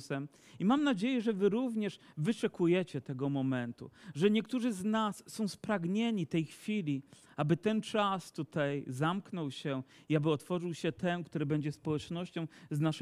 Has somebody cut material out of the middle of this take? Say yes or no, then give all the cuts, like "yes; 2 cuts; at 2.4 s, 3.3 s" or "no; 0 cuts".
no; 0 cuts